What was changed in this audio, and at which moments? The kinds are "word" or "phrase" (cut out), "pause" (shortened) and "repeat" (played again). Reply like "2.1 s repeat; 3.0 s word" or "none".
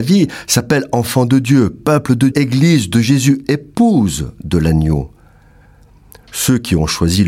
2.3 s word